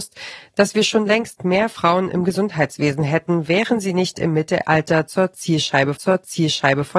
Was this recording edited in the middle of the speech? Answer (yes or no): yes